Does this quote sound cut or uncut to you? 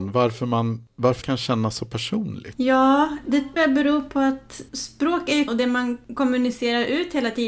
cut